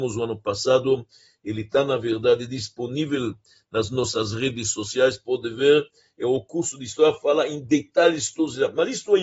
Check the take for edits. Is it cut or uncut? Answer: uncut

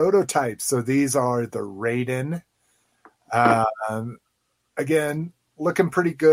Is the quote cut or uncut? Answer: uncut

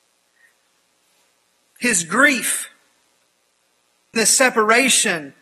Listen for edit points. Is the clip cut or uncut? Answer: cut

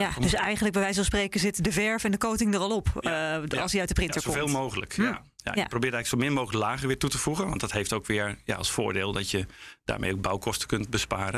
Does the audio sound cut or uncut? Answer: uncut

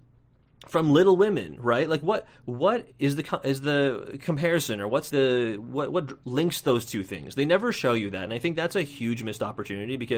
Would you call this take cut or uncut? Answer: cut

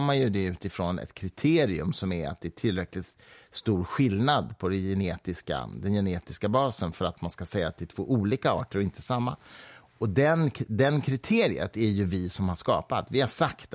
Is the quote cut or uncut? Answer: uncut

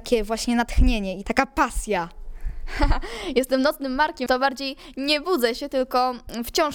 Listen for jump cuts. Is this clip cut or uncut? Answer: cut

